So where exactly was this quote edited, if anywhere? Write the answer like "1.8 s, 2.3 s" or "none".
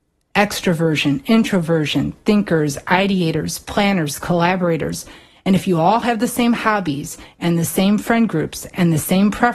none